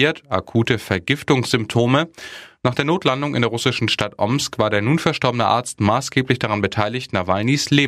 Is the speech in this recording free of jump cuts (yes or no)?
yes